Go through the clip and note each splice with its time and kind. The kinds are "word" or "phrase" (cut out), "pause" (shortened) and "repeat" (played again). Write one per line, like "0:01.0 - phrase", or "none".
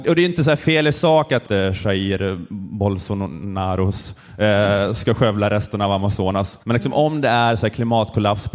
0:01.4 - phrase
0:06.6 - pause

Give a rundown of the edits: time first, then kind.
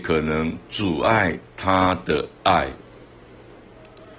0:01.5 - pause

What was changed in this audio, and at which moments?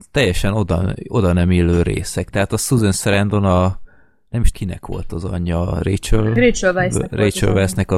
0:04.5 - word

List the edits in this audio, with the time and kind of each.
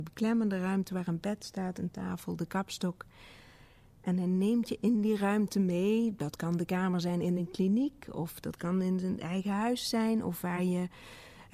none

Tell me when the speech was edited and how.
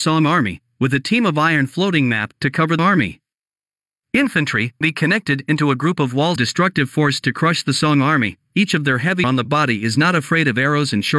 0:02.8 - word
0:04.8 - word
0:06.4 - word
0:09.2 - word

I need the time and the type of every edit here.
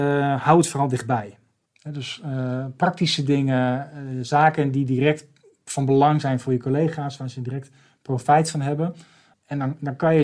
none

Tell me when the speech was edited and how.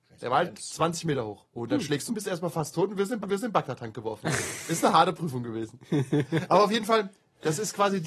0:01.5 - pause
0:02.1 - phrase
0:03.2 - repeat

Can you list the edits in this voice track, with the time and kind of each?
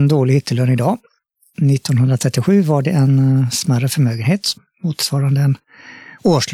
none

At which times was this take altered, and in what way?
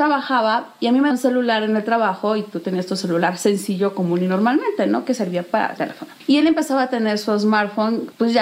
0:01.1 - word
0:05.8 - word

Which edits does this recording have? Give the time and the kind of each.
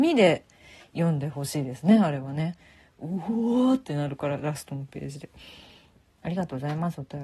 none

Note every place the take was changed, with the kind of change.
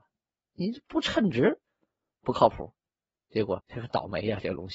0:03.6 - word

